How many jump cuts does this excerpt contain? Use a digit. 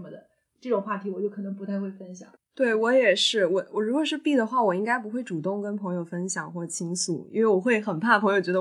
1